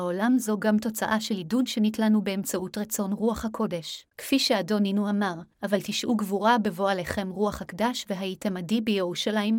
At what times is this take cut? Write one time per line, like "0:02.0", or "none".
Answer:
0:04.1
0:05.5